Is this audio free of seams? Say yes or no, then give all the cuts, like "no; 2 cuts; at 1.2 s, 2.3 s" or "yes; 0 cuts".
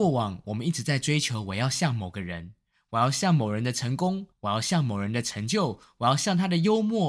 no; 1 cut; at 4.3 s